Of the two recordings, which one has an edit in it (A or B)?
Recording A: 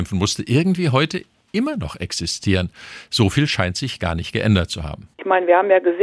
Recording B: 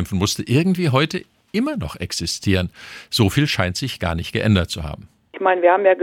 A